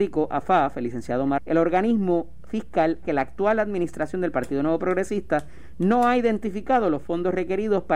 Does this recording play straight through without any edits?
no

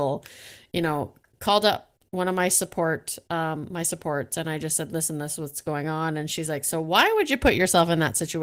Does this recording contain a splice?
no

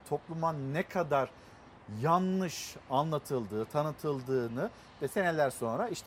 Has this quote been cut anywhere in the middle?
no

